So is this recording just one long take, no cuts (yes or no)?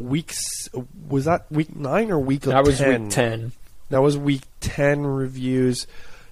yes